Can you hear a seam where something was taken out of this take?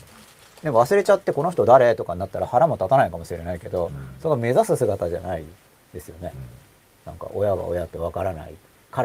no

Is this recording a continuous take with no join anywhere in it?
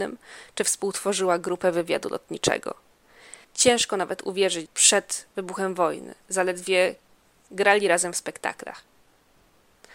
no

